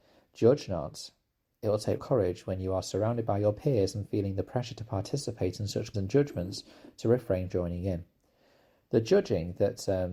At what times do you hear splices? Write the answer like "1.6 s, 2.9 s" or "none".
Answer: 2.0 s, 5.9 s, 7.5 s